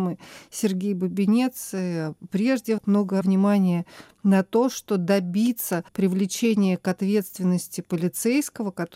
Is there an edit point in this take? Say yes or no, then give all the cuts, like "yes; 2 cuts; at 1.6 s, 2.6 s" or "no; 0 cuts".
yes; 2 cuts; at 3.2 s, 5.9 s